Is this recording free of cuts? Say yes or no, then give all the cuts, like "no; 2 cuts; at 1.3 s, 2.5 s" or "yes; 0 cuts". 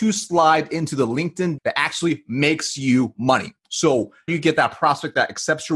no; 2 cuts; at 1.6 s, 4.3 s